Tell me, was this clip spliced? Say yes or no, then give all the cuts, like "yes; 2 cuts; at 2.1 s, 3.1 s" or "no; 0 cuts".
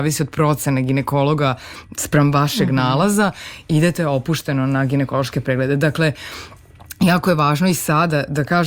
no; 0 cuts